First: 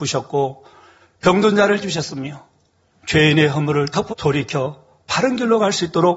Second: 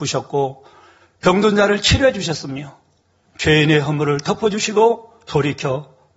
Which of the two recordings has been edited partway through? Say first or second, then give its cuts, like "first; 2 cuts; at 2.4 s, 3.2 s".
first; 2 cuts; at 1.8 s, 4.1 s